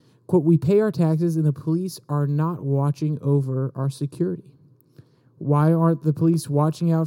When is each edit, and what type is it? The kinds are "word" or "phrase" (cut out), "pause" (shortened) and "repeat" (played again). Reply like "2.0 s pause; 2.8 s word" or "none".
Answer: none